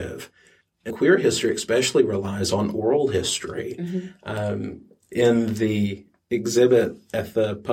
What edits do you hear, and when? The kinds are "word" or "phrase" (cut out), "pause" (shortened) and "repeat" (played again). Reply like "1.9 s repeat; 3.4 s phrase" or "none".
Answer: 0.9 s word